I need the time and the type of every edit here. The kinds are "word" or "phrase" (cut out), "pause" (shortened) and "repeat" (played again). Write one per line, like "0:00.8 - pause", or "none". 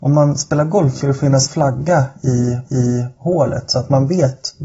0:01.0 - word
0:01.5 - word
0:02.6 - repeat